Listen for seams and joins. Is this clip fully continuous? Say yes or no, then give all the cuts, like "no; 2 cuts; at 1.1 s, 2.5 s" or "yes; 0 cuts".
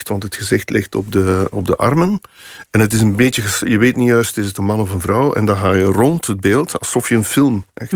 yes; 0 cuts